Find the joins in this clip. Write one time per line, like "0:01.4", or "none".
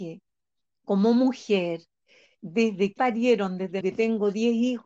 0:02.4
0:03.0
0:03.8

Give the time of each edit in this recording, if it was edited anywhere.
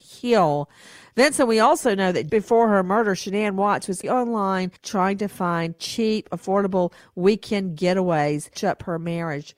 0:02.3
0:04.0
0:04.8
0:08.6

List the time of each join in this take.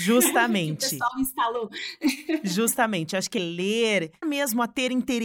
0:03.4
0:04.2

